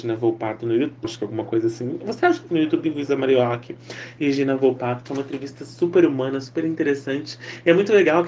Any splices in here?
yes; 2 cuts; at 1.0 s, 2.5 s

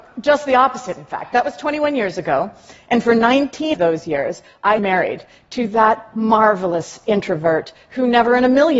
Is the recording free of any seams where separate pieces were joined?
no; 2 cuts; at 3.7 s, 4.8 s

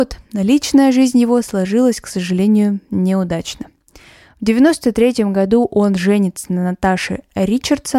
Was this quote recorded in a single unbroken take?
yes; 0 cuts

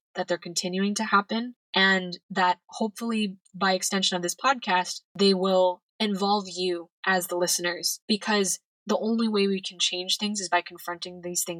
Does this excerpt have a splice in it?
yes; 3 cuts; at 5.0 s, 5.9 s, 7.0 s

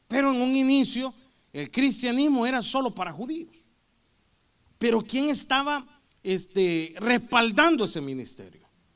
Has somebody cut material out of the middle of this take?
no; 0 cuts

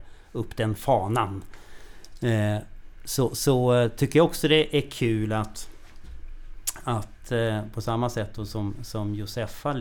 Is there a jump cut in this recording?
no; 0 cuts

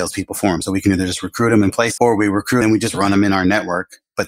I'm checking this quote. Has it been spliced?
yes; 2 cuts; at 2.0 s, 2.6 s

